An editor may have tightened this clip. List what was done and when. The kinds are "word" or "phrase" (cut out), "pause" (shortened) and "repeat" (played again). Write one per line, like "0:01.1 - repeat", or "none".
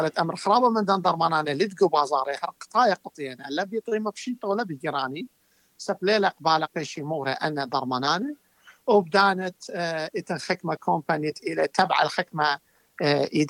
0:06.7 - word

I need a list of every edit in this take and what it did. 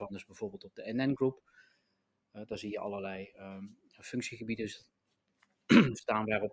none

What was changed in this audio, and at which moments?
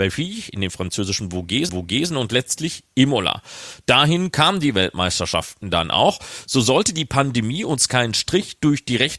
0:01.7 - repeat

